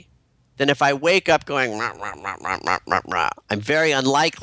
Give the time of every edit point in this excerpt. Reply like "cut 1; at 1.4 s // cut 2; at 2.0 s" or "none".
none